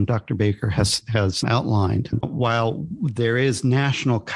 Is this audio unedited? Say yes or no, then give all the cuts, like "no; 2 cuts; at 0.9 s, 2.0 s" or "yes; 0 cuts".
no; 1 cut; at 2.2 s